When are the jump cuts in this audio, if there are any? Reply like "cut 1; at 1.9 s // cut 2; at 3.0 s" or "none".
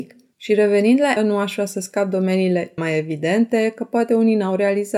cut 1; at 1.2 s // cut 2; at 2.8 s